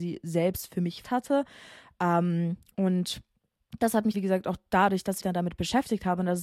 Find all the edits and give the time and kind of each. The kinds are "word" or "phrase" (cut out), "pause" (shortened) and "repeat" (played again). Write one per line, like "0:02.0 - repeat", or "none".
0:01.0 - word
0:04.1 - word
0:05.2 - word